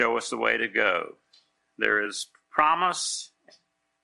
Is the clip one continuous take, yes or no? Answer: yes